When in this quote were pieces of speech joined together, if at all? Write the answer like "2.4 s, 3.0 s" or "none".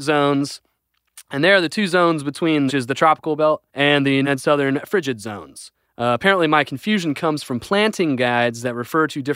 2.7 s, 3.7 s, 4.2 s, 5.8 s